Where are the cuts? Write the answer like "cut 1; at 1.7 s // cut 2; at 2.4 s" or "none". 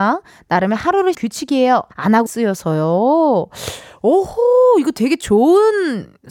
cut 1; at 1.1 s // cut 2; at 1.9 s // cut 3; at 2.3 s